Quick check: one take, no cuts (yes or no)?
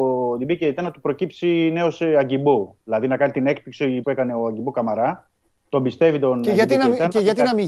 no